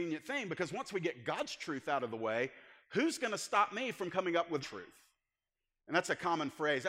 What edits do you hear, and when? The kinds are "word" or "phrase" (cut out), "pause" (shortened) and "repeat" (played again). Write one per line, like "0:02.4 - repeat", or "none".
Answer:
0:04.6 - word